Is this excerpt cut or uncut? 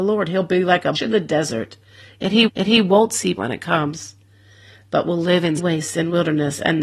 cut